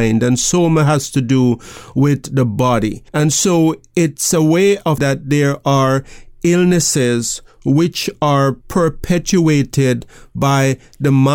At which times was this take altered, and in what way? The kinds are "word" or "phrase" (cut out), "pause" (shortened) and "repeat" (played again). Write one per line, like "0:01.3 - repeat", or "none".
0:03.1 - pause
0:05.0 - word
0:08.6 - pause

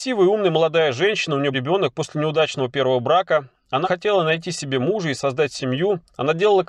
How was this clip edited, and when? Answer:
0:01.5 - word
0:03.8 - word

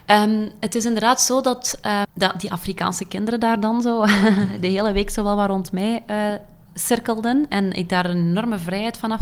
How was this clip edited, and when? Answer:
0:02.0 - word

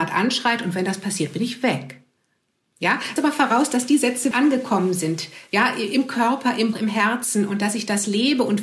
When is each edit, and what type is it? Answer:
0:03.2 - word
0:04.3 - word
0:06.7 - word

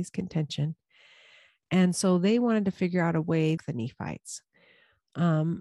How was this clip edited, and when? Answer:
0:03.6 - phrase

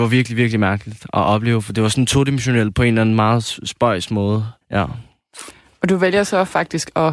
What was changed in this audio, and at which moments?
0:04.6 - pause

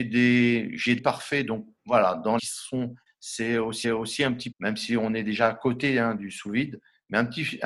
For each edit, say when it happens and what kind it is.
0:01.0 - phrase
0:01.8 - pause
0:02.4 - phrase
0:03.1 - word
0:03.8 - repeat
0:04.5 - word

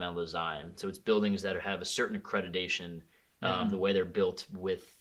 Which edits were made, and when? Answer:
none

